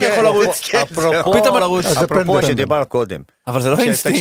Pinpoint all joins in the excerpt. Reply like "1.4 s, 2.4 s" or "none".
1.6 s, 2.4 s, 2.9 s